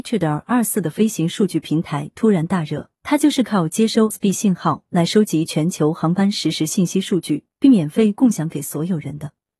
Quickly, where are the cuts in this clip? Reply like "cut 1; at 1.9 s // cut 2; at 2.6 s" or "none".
cut 1; at 3.0 s // cut 2; at 4.1 s // cut 3; at 7.5 s